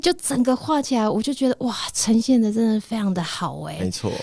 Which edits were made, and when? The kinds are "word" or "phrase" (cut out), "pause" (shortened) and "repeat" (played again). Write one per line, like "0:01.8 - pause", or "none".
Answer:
none